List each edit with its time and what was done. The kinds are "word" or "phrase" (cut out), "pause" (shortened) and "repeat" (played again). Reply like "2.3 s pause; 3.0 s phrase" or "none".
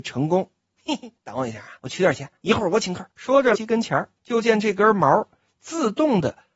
1.2 s pause; 1.8 s pause; 2.4 s pause; 3.1 s pause; 3.5 s phrase; 4.2 s pause